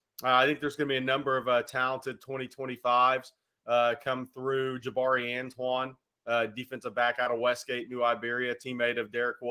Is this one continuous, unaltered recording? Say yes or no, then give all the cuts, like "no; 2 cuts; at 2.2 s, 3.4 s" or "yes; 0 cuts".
yes; 0 cuts